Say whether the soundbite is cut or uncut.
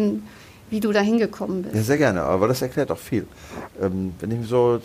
uncut